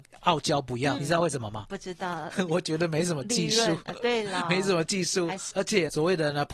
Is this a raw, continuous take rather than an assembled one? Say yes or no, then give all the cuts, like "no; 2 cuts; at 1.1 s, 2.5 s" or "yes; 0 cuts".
no; 1 cut; at 1.0 s